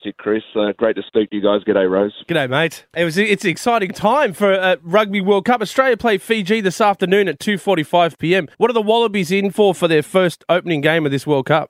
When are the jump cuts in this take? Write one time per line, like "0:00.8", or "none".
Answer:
0:02.9
0:08.5